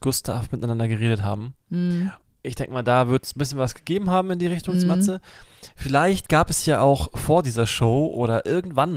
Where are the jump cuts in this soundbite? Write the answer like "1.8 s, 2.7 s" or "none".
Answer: 2.3 s